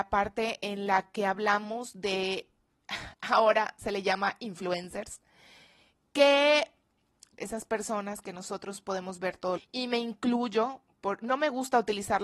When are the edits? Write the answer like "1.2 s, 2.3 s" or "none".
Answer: 3.1 s, 7.4 s, 9.6 s